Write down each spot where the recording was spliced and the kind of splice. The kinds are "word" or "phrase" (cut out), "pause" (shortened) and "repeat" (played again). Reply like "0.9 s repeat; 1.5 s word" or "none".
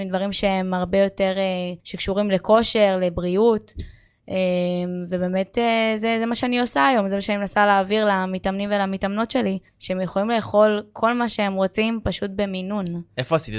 1.8 s pause; 9.7 s pause

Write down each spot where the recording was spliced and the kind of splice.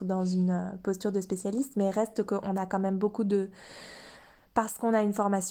none

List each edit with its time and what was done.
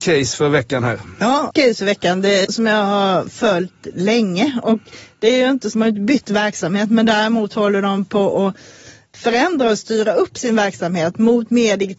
1.5 s word; 2.4 s phrase; 5.7 s phrase

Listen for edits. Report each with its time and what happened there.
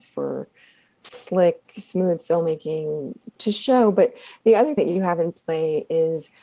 1.1 s word; 4.8 s word

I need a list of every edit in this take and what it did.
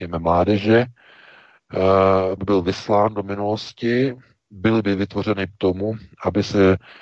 2.4 s word; 4.4 s word; 5.5 s word

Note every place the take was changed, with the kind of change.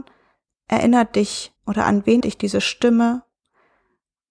1.6 s pause; 2.2 s word

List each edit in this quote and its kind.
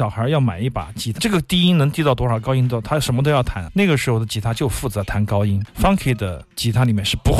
1.2 s phrase; 6.5 s pause

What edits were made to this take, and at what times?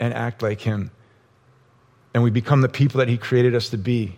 none

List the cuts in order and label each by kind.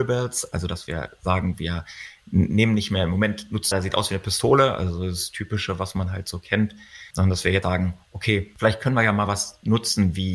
3.7 s phrase; 7.6 s word

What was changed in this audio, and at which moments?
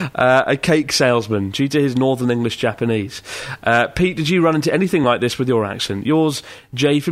none

